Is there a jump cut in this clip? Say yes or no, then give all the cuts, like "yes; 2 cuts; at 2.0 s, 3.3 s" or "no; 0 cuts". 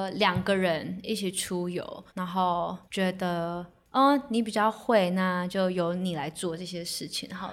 yes; 2 cuts; at 2.1 s, 2.8 s